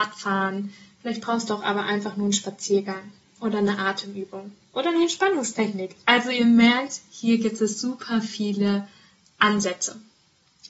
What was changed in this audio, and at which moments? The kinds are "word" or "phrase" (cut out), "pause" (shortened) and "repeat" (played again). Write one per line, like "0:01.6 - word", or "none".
none